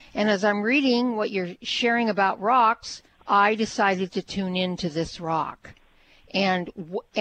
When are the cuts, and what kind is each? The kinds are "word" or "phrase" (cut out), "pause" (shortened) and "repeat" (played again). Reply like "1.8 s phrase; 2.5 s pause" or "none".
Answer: 3.1 s pause